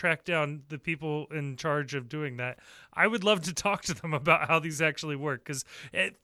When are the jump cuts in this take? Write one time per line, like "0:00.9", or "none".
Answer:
none